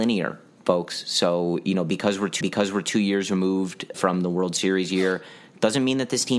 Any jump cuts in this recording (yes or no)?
yes